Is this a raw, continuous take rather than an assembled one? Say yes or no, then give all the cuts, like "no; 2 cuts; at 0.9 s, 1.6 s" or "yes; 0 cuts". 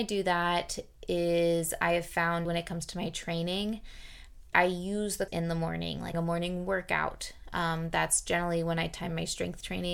no; 4 cuts; at 2.4 s, 4.5 s, 5.3 s, 6.1 s